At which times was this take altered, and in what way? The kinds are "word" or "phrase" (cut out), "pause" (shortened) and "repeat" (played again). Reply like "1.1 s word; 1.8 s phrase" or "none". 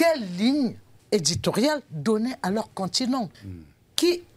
1.0 s pause; 3.3 s pause